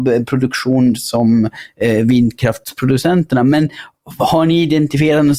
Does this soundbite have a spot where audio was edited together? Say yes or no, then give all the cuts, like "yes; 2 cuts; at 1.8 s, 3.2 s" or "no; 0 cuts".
no; 0 cuts